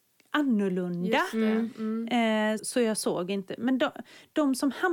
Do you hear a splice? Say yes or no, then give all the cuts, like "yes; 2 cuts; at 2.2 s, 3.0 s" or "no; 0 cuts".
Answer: yes; 1 cut; at 2.6 s